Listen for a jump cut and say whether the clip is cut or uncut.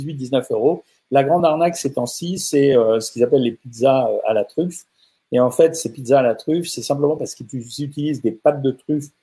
uncut